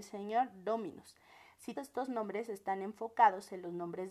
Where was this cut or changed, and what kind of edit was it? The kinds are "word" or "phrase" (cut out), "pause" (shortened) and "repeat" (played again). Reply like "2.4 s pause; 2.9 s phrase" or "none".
1.7 s phrase